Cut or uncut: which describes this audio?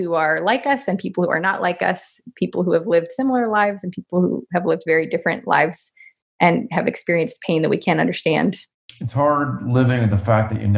uncut